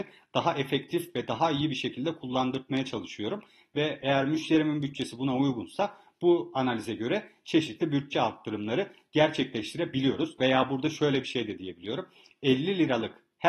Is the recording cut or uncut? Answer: uncut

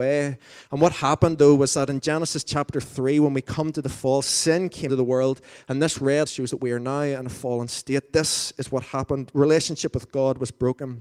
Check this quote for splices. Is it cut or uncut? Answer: cut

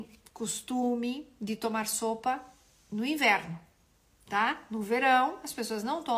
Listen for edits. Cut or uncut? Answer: uncut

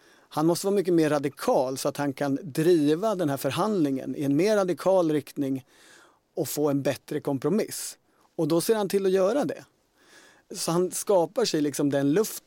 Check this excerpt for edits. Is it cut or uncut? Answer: uncut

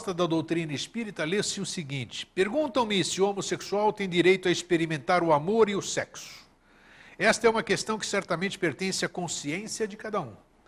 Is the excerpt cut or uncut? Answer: uncut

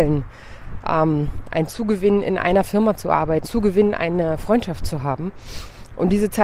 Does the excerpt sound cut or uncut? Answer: cut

